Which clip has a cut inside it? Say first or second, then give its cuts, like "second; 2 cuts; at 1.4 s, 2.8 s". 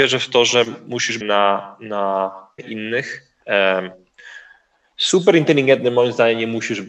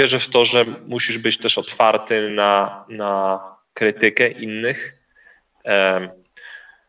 first; 3 cuts; at 1.2 s, 2.6 s, 3.4 s